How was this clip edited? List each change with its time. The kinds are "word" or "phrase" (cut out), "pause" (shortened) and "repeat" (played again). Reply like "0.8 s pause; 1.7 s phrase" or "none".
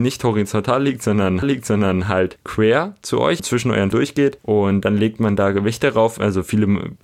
1.4 s repeat; 3.4 s word; 3.9 s word